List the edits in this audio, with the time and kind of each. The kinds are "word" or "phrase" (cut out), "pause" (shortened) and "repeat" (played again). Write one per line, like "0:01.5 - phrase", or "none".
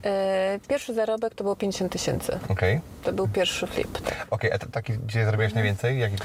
0:04.7 - phrase